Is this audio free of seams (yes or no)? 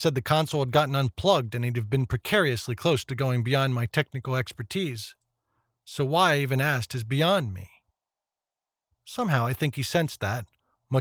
yes